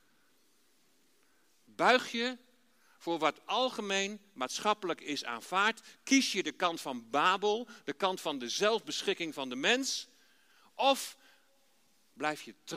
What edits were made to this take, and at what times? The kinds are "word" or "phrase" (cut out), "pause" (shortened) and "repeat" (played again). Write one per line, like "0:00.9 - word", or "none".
none